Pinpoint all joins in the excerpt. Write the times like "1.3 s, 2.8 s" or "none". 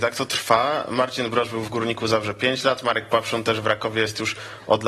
none